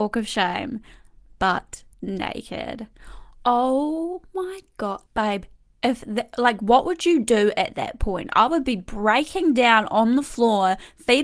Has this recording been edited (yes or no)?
yes